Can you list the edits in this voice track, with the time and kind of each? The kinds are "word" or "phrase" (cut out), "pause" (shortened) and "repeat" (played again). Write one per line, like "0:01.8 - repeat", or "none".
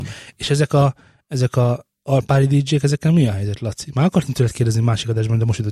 none